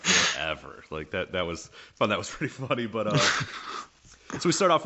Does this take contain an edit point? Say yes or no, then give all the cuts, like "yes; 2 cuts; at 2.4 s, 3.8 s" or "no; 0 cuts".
no; 0 cuts